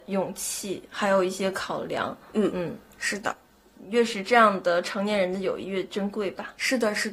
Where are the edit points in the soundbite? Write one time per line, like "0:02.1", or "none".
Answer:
none